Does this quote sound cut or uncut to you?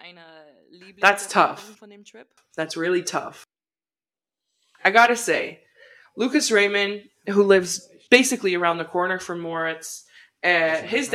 uncut